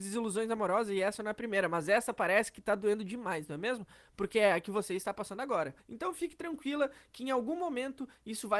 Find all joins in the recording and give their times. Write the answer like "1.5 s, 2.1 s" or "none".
5.8 s